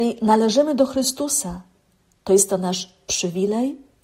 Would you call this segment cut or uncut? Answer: uncut